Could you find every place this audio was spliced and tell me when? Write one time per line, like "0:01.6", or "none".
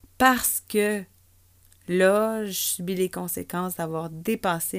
none